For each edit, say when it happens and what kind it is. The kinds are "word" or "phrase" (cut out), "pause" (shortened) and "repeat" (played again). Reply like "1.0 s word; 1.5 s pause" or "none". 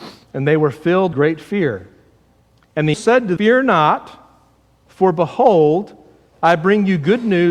1.1 s word; 2.9 s word; 3.4 s word